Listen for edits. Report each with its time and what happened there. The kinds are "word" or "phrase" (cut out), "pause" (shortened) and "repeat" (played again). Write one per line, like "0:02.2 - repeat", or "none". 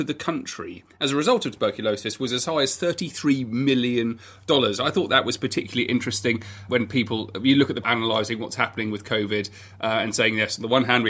0:06.7 - word
0:07.8 - phrase